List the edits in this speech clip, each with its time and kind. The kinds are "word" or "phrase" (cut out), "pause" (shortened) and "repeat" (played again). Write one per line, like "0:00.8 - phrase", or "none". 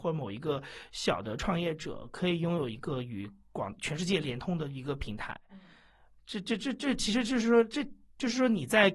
none